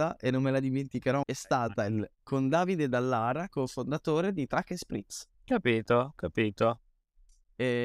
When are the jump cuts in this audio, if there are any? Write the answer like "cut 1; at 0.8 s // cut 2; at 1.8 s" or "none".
cut 1; at 1.2 s // cut 2; at 2.2 s // cut 3; at 3.5 s // cut 4; at 5.3 s